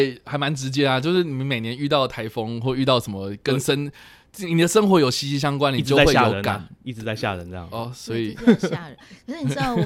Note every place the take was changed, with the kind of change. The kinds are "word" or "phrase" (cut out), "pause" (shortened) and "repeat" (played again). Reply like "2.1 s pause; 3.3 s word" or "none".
none